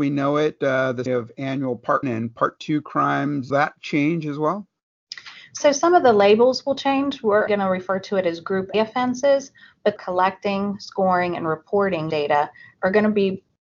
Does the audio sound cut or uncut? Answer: cut